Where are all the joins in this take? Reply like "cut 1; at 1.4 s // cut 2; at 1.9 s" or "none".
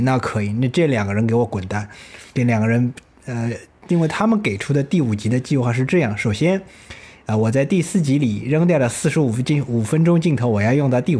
cut 1; at 2.3 s